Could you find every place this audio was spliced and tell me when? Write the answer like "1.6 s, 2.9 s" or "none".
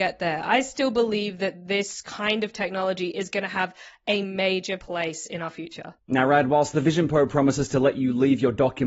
none